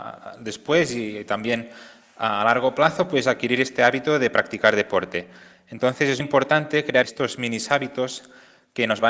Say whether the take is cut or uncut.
cut